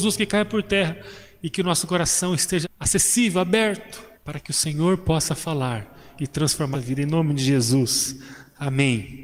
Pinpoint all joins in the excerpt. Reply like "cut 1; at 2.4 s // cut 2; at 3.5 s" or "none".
cut 1; at 2.6 s // cut 2; at 4.1 s // cut 3; at 6.7 s